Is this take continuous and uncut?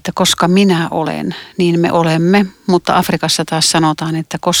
yes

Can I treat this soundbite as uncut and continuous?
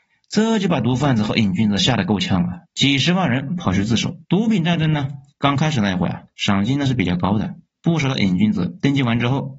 no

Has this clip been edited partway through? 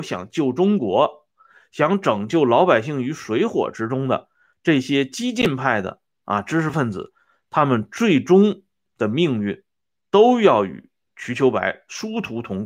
no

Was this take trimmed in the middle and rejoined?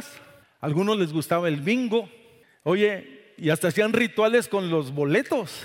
no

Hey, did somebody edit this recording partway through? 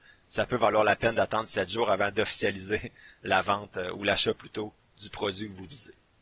no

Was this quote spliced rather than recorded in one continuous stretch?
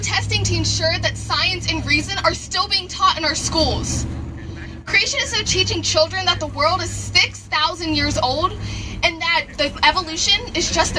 no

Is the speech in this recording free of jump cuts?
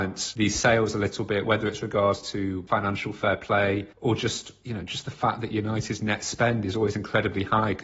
no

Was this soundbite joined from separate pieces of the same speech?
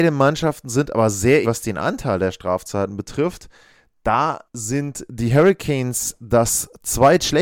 yes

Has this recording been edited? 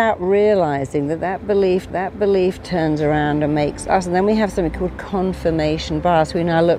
yes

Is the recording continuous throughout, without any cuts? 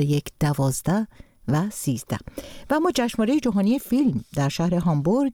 yes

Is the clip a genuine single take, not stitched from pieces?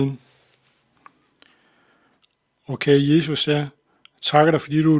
yes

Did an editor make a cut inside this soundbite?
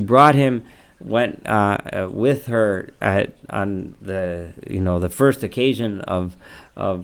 no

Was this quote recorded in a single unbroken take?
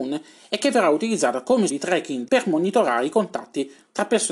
no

